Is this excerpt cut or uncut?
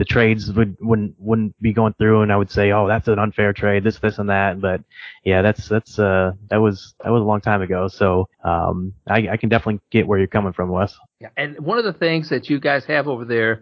cut